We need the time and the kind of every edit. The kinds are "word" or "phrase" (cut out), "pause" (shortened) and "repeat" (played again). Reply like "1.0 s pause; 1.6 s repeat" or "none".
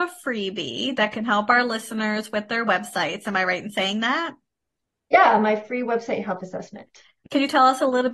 none